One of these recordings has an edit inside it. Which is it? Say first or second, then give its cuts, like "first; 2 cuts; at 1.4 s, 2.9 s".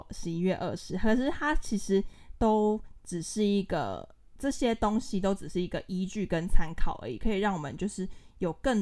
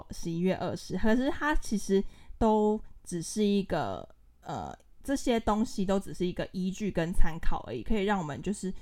first; 1 cut; at 4.2 s